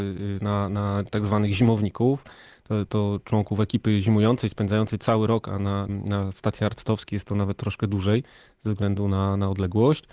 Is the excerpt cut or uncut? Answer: cut